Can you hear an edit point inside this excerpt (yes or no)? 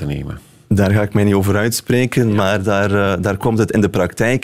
no